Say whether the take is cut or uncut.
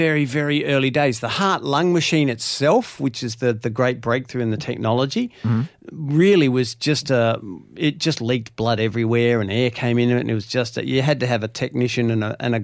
uncut